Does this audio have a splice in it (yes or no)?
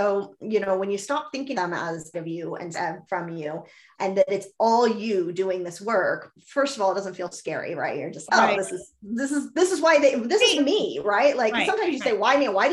yes